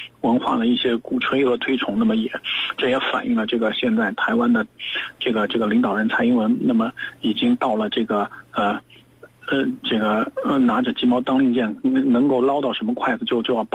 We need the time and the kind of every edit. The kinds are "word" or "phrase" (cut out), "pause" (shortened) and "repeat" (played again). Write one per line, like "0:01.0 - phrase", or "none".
none